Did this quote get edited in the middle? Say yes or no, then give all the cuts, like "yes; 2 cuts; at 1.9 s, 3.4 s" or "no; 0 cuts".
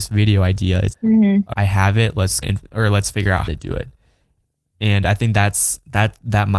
yes; 4 cuts; at 0.9 s, 1.5 s, 2.4 s, 3.5 s